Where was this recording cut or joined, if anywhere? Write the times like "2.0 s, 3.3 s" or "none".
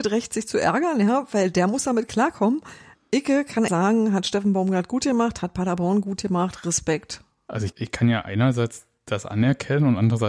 3.7 s, 7.7 s